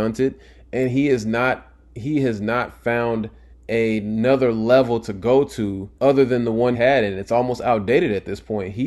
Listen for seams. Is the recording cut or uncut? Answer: cut